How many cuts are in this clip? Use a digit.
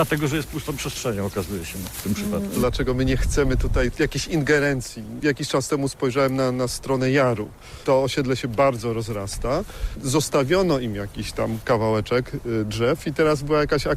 0